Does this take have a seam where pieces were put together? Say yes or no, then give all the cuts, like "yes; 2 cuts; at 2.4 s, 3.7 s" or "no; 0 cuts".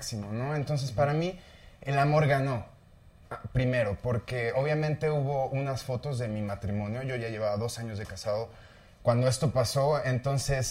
no; 0 cuts